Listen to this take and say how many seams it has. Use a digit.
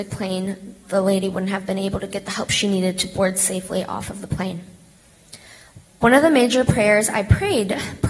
0